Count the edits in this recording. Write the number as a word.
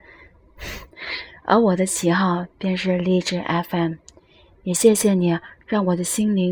zero